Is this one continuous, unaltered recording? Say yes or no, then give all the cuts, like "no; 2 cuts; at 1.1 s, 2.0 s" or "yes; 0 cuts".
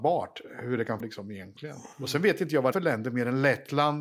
no; 3 cuts; at 1.0 s, 1.9 s, 2.7 s